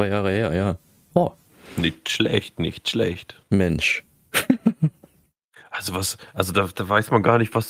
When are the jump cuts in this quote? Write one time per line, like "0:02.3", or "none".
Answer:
none